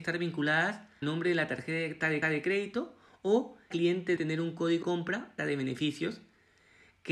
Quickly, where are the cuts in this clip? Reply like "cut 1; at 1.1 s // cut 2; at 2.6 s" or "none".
cut 1; at 1.0 s // cut 2; at 2.2 s // cut 3; at 3.7 s // cut 4; at 4.2 s // cut 5; at 4.8 s // cut 6; at 5.4 s